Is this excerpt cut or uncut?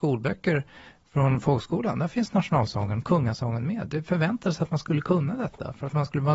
uncut